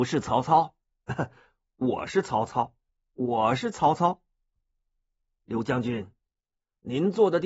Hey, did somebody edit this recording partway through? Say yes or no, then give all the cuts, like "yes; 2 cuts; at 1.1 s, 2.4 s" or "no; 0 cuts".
no; 0 cuts